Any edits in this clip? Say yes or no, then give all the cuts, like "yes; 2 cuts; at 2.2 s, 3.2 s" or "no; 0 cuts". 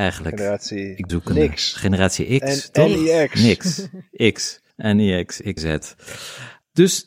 yes; 3 cuts; at 1.1 s, 4.7 s, 5.6 s